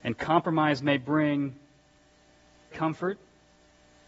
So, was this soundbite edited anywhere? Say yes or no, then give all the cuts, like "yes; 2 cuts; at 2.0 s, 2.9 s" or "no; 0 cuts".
yes; 1 cut; at 2.7 s